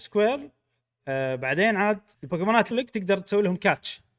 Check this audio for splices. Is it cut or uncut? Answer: cut